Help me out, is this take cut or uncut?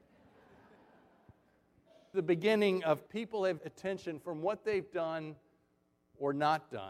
cut